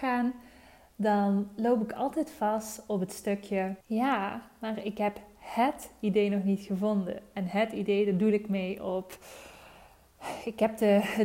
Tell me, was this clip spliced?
yes; 1 cut; at 3.8 s

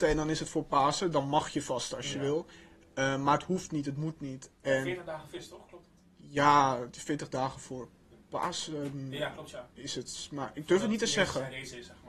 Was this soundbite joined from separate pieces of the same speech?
no; 0 cuts

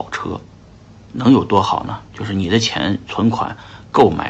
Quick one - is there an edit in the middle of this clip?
yes; 1 cut; at 1.1 s

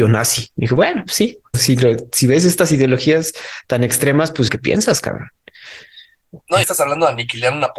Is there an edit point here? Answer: yes; 3 cuts; at 1.5 s, 4.5 s, 6.6 s

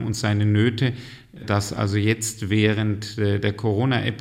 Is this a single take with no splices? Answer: yes; 0 cuts

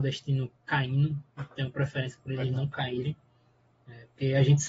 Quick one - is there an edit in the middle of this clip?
yes; 1 cut; at 1.3 s

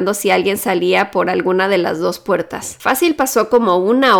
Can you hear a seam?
no; 0 cuts

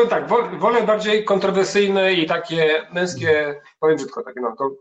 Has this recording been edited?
no; 0 cuts

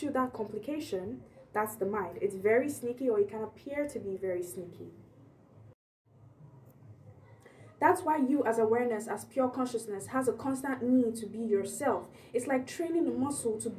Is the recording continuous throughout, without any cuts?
yes; 0 cuts

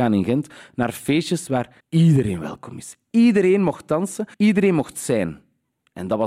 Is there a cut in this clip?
yes; 2 cuts; at 1.8 s, 4.3 s

